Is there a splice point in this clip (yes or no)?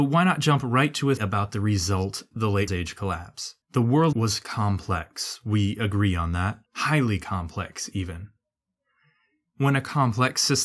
yes